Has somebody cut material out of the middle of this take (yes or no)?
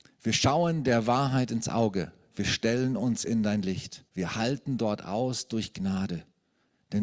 yes